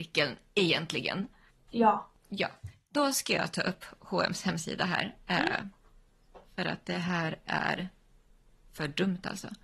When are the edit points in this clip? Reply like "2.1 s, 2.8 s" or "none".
none